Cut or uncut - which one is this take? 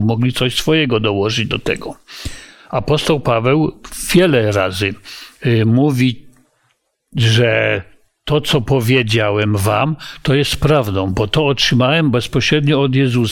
uncut